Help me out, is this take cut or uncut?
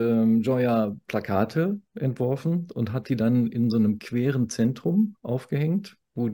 uncut